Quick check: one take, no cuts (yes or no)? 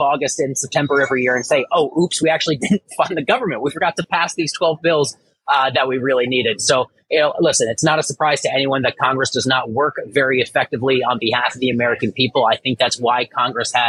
yes